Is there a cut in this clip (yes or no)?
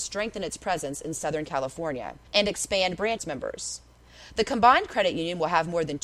yes